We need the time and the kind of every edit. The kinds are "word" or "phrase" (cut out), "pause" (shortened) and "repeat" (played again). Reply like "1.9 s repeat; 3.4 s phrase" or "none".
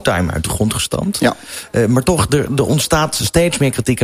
none